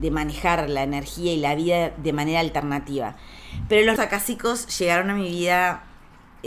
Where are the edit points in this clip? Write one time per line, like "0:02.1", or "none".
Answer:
0:04.0